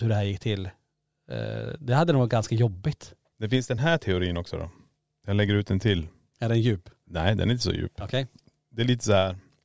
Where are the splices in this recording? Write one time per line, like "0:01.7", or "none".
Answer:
none